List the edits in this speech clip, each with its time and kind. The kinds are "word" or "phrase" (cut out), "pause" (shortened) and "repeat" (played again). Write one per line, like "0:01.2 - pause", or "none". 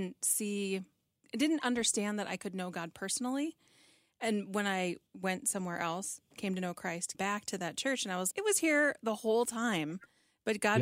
0:05.1 - pause
0:07.1 - word
0:08.3 - word